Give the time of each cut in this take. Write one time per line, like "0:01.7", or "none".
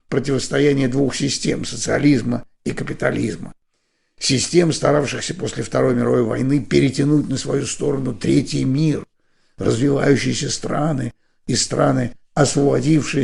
none